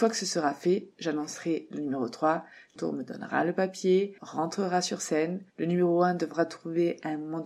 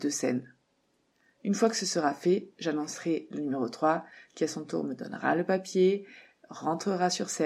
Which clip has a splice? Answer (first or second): first